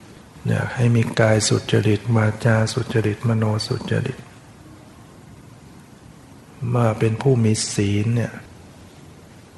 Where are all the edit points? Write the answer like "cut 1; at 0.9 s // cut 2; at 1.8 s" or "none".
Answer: none